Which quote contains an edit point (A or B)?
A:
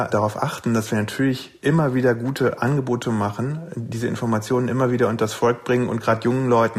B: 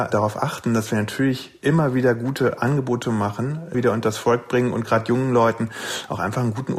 B